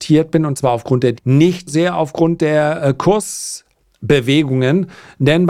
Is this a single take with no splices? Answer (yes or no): no